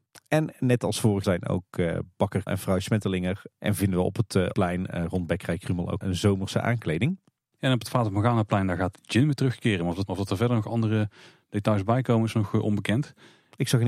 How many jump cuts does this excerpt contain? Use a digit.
4